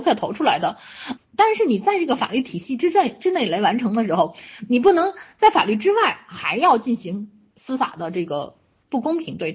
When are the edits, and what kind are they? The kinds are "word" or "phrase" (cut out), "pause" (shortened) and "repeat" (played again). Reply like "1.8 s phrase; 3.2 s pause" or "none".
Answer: 1.2 s word